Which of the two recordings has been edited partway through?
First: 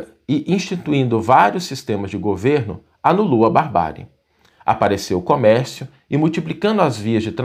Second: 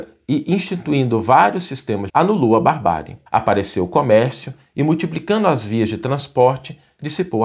second; 2 cuts; at 2.1 s, 3.3 s

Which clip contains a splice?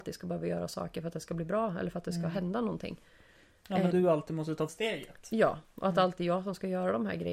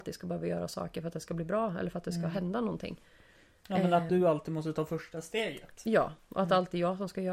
first; 2 cuts; at 3.9 s, 4.7 s

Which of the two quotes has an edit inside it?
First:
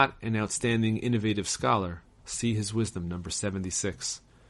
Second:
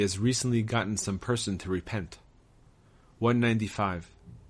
first; 1 cut; at 2.2 s

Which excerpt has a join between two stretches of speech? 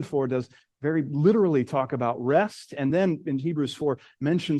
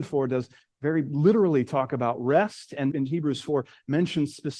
second; 1 cut; at 2.9 s

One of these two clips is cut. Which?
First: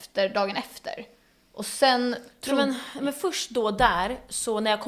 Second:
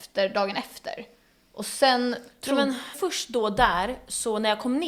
second; 1 cut; at 2.9 s

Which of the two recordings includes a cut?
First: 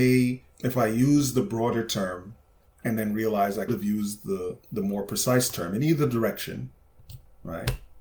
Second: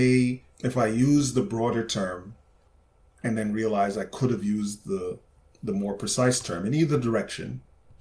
first; 3 cuts; at 2.7 s, 3.7 s, 4.6 s

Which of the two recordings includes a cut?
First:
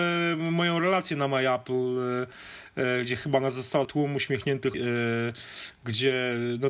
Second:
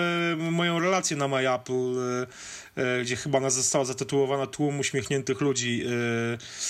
first; 2 cuts; at 3.8 s, 4.7 s

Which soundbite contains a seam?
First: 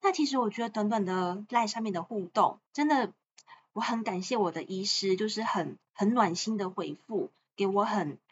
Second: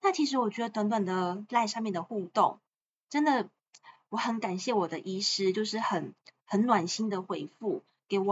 first; 2 cuts; at 2.7 s, 5.9 s

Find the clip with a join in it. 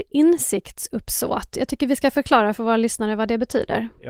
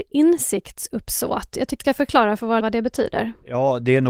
second; 2 cuts; at 1.8 s, 2.6 s

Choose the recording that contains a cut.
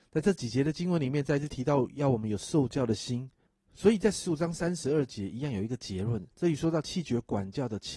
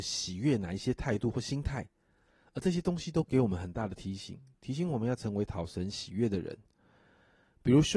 first; 2 cuts; at 3.5 s, 6.3 s

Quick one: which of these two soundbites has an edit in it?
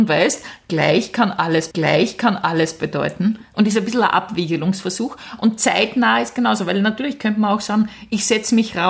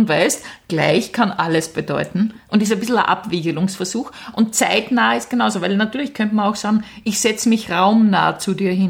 first; 1 cut; at 1.7 s

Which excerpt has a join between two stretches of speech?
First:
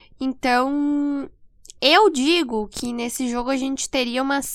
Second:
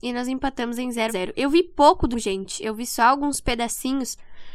second; 2 cuts; at 1.1 s, 2.1 s

